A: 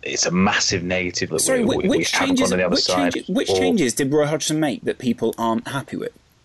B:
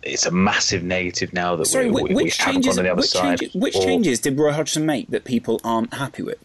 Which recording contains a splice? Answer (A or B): A